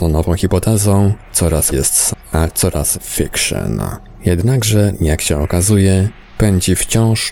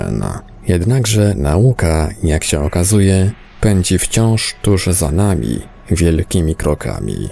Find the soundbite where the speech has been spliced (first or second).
first